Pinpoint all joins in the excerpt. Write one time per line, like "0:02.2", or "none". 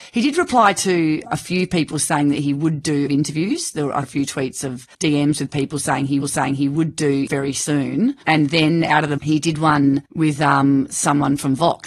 0:03.1
0:04.0
0:04.9
0:06.2
0:07.3
0:08.2
0:09.2
0:10.1